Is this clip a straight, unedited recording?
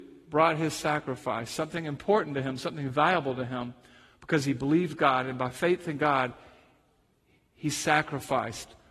yes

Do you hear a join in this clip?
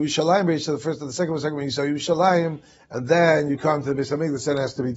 no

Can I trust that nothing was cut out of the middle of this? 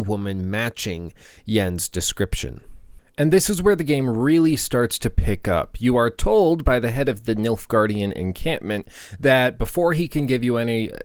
yes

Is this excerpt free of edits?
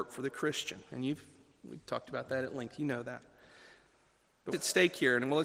no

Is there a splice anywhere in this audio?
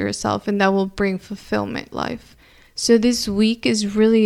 yes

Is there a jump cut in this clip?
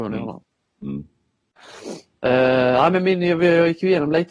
no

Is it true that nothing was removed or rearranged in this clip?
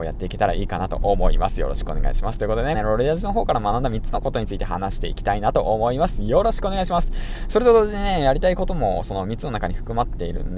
no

